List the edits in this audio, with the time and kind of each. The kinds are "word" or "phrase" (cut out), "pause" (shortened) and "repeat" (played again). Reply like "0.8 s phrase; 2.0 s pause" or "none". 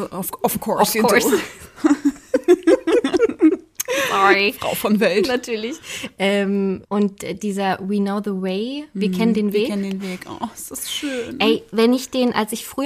6.8 s pause